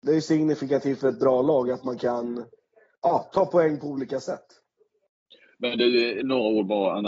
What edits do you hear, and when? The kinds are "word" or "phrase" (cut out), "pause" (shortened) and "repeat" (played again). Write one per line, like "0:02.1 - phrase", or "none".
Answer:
none